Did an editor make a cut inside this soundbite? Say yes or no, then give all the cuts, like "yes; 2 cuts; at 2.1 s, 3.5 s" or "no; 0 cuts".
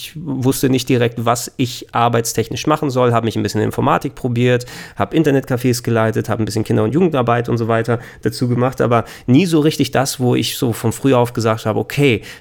no; 0 cuts